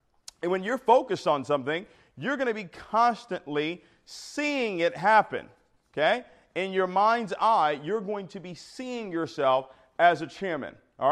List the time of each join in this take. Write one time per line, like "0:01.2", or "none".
none